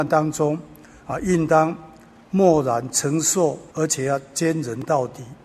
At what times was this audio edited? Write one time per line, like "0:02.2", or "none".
0:03.7